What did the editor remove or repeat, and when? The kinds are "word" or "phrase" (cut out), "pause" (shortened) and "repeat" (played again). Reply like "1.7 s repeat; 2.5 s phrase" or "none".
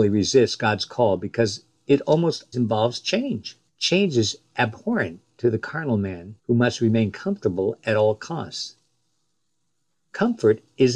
2.5 s word; 3.7 s pause; 6.4 s pause